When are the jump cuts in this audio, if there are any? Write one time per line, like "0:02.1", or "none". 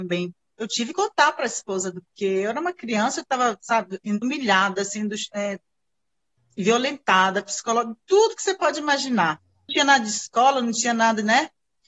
0:00.9
0:02.1
0:04.2
0:09.7